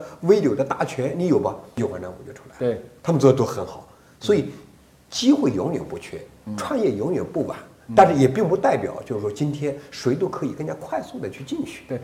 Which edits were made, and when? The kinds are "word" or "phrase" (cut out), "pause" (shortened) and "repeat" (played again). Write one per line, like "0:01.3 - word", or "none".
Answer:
none